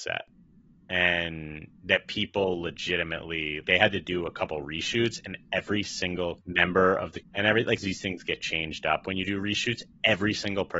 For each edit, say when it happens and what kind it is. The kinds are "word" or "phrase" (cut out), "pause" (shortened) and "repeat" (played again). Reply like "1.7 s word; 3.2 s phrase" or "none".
1.7 s pause; 3.6 s word; 6.4 s phrase; 7.2 s word; 7.8 s word